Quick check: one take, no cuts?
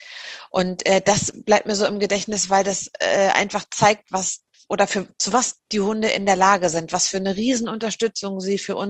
yes; 0 cuts

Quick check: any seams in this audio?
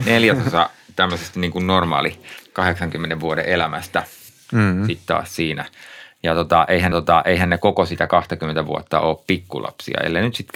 yes; 1 cut; at 6.9 s

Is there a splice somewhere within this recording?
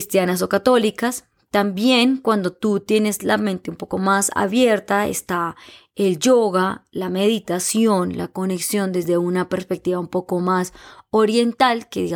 no; 0 cuts

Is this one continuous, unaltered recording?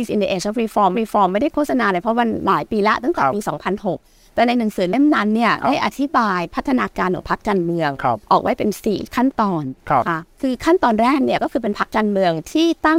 no; 3 cuts; at 0.9 s, 8.2 s, 10.3 s

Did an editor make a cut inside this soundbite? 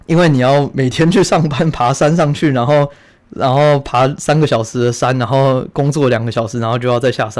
no; 0 cuts

